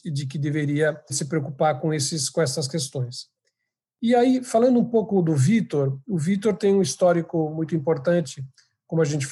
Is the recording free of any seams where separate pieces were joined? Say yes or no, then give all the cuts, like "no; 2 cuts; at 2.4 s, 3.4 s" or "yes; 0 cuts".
no; 1 cut; at 1.1 s